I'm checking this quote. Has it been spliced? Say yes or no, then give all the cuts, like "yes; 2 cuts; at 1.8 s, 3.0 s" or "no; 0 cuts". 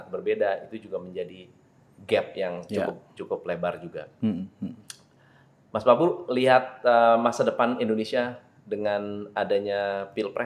no; 0 cuts